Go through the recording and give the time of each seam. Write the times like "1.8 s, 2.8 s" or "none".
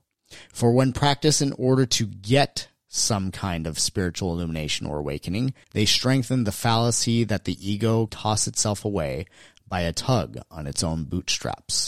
5.6 s, 8.1 s